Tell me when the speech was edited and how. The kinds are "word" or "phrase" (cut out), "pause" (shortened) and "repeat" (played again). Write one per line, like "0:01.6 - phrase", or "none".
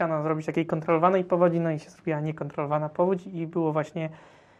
none

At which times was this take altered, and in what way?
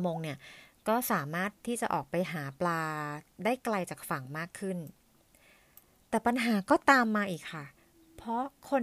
0:07.8 - pause

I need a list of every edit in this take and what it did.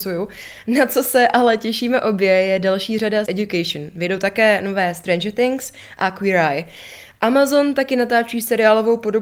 0:03.3 - word

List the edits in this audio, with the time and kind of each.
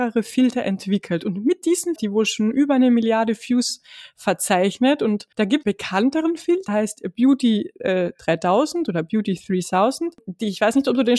0:02.0 - phrase
0:05.3 - pause
0:05.6 - phrase
0:06.7 - word

